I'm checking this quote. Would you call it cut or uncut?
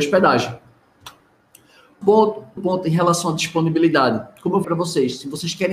cut